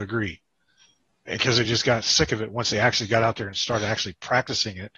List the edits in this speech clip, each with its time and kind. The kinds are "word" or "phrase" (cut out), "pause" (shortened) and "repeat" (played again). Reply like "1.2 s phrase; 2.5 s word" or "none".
none

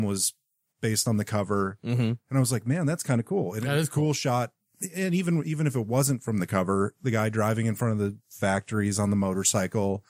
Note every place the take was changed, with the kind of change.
2.2 s pause

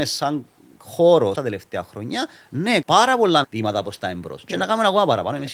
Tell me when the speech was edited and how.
1.3 s phrase; 2.8 s word; 3.4 s word

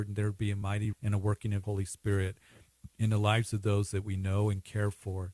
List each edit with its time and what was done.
0.9 s word; 1.6 s word; 2.9 s pause

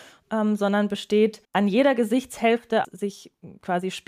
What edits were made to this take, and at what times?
1.4 s pause; 2.8 s word

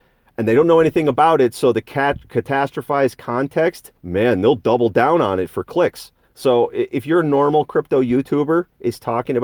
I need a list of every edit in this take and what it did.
4.0 s pause; 6.2 s pause

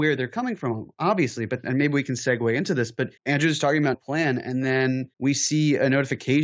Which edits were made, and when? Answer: 1.6 s word; 3.2 s pause; 3.9 s word; 5.1 s pause

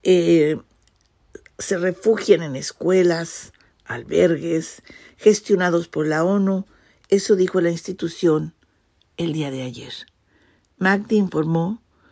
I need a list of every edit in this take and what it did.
none

